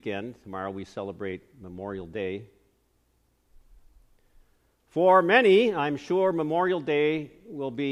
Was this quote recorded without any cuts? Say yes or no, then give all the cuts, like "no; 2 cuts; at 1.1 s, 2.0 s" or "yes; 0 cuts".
yes; 0 cuts